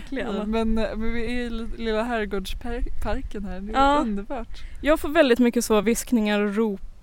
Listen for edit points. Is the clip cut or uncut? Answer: uncut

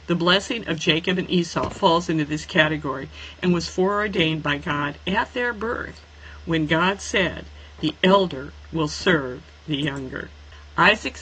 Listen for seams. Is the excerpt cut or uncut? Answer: uncut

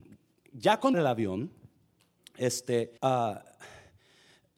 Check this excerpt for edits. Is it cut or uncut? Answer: cut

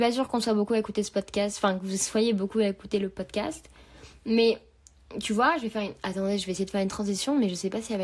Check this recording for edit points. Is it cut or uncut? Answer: uncut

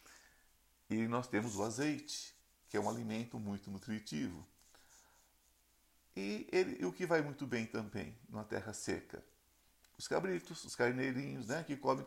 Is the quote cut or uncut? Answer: uncut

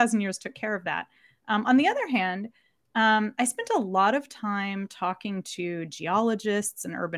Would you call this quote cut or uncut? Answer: uncut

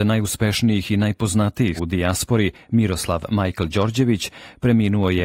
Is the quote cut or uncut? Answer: cut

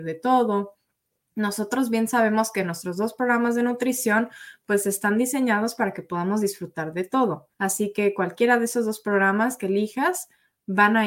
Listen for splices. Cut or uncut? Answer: cut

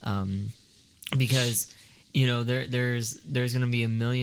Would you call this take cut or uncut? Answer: uncut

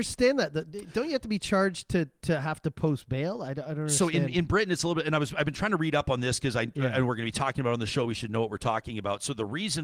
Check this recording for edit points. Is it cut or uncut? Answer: uncut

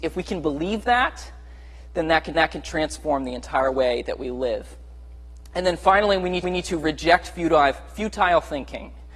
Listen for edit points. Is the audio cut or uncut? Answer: cut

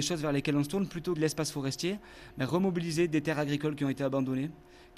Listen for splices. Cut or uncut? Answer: cut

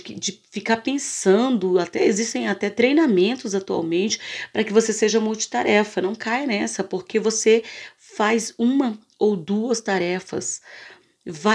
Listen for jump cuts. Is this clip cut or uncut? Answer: uncut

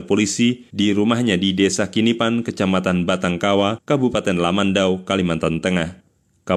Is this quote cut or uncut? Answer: uncut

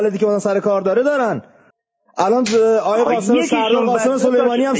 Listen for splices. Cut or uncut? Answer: cut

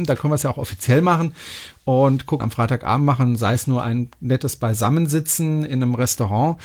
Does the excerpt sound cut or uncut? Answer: cut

